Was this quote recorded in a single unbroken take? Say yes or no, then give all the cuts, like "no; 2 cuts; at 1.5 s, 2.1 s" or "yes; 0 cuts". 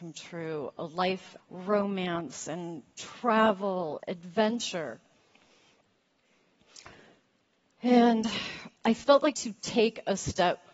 no; 4 cuts; at 1.4 s, 4.0 s, 8.8 s, 9.3 s